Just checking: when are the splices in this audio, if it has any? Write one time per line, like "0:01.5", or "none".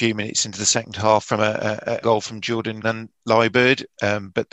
0:02.0
0:02.8